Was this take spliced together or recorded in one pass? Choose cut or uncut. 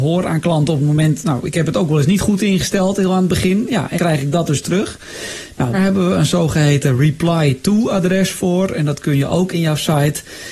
cut